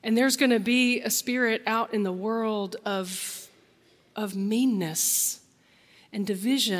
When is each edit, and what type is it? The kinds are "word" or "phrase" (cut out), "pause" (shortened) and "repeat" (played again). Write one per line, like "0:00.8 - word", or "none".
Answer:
none